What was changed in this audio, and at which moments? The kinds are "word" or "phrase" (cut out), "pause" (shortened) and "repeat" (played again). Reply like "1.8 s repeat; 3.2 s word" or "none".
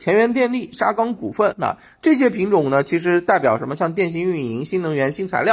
1.5 s word

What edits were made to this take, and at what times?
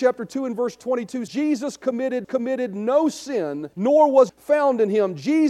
1.3 s word; 2.2 s repeat; 3.7 s pause; 4.3 s word

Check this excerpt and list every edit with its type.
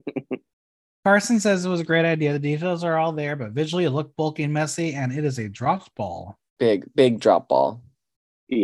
6.5 s pause

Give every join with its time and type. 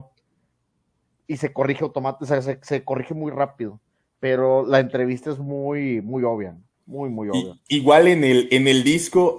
none

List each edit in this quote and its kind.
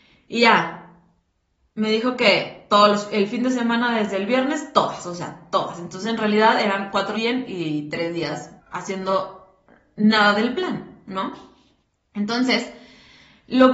7.1 s word; 8.6 s word

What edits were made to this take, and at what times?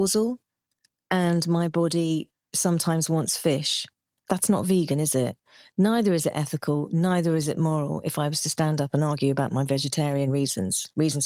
none

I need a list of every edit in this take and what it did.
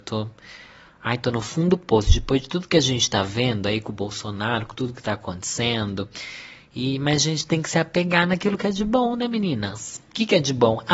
none

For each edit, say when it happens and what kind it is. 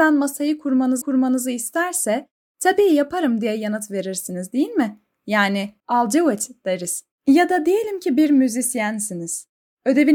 1.0 s repeat; 5.8 s word; 7.1 s pause

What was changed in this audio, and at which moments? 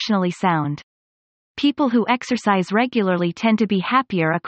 none

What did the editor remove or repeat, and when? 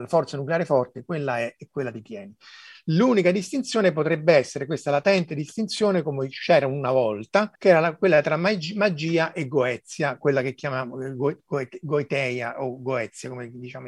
7.5 s pause

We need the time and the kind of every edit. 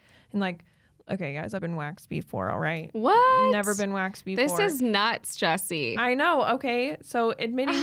1.6 s word

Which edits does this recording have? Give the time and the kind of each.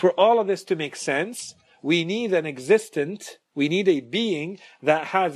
none

